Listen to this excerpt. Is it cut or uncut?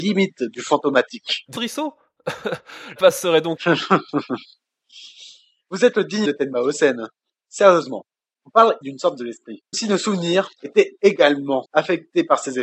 cut